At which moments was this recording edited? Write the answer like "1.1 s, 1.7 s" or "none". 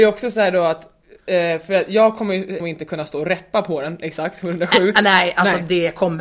2.6 s